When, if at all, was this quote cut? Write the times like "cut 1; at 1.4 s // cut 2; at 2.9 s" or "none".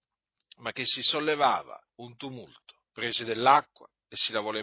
cut 1; at 1.9 s // cut 2; at 2.9 s